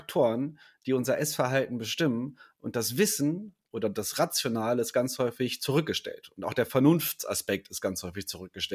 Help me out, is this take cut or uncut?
uncut